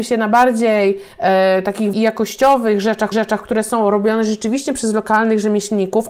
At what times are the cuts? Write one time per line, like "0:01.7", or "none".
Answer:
0:01.1
0:01.9
0:03.1